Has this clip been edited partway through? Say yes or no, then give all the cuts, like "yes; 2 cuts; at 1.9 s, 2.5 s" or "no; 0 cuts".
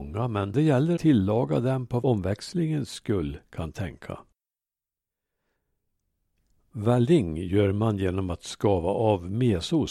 yes; 2 cuts; at 1.0 s, 2.0 s